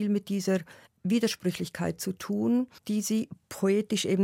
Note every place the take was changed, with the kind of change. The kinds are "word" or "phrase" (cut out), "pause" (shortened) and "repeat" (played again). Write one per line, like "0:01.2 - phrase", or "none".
0:02.8 - pause

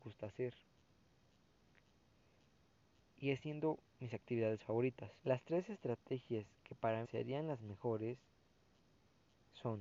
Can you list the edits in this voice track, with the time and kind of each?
0:05.2 - pause
0:07.0 - word

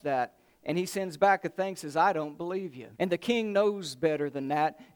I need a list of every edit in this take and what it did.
0:02.9 - pause

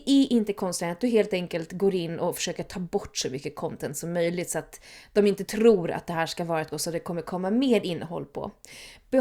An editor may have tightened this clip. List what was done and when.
0:06.7 - word

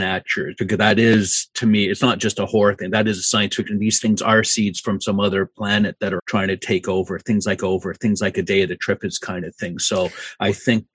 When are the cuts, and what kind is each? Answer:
0:06.2 - word
0:07.6 - repeat

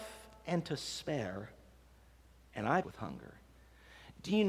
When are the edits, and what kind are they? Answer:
0:02.8 - word

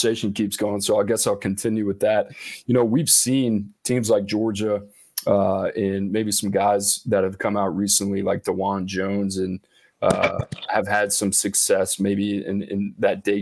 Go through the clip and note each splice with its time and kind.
none

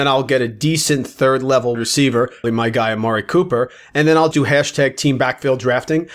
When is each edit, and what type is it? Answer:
0:01.7 - word
0:02.4 - word
0:04.3 - word

